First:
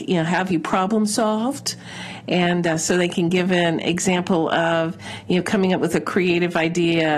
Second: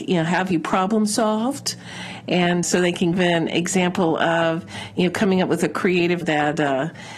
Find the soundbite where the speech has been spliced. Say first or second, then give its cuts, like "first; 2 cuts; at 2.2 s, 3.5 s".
second; 3 cuts; at 2.6 s, 3.1 s, 6.2 s